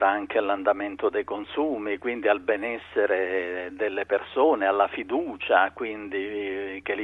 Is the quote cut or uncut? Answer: uncut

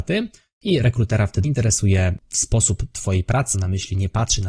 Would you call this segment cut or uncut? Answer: cut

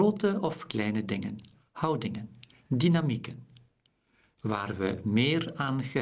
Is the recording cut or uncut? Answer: uncut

